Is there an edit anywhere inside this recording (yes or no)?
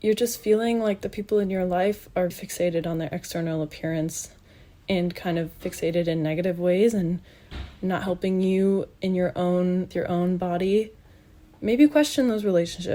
yes